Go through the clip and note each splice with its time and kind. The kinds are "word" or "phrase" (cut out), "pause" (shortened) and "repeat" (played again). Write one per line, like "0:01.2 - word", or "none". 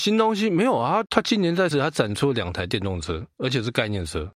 0:01.7 - word